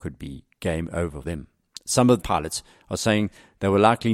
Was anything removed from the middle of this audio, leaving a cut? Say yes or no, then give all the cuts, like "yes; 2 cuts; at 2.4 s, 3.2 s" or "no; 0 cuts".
yes; 2 cuts; at 1.2 s, 2.2 s